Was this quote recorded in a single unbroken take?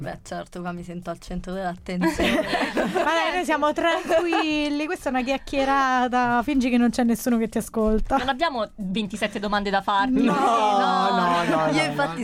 no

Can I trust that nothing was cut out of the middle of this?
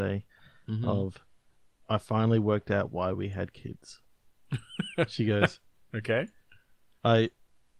yes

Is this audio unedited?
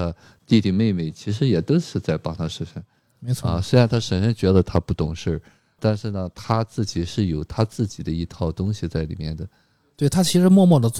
yes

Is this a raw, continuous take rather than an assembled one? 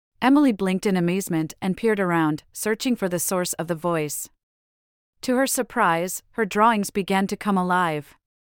yes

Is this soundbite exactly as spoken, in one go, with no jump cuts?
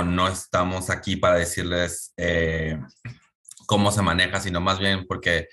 yes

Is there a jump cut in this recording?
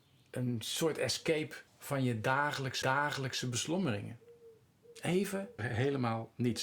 yes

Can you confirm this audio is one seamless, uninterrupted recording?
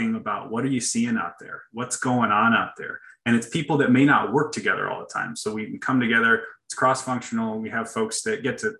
yes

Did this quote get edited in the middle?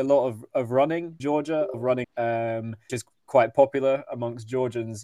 yes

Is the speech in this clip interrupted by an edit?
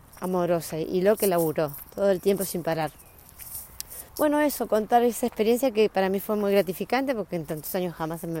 yes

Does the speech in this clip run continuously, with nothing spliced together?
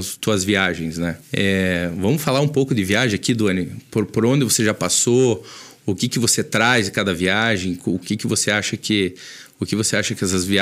no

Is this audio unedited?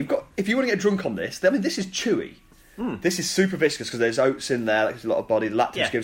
yes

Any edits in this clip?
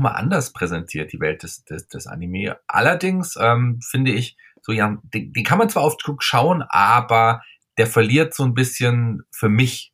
no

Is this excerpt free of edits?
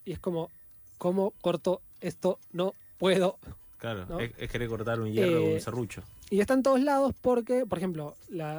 no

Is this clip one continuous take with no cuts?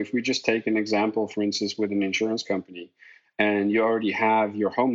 yes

